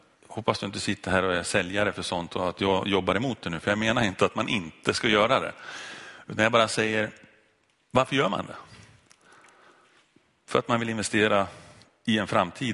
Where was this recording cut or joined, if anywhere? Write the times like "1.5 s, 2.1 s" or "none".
none